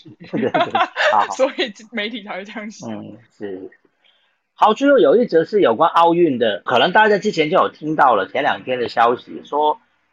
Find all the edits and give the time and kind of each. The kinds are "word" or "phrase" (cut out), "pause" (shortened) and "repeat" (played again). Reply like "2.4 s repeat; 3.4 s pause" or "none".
6.7 s word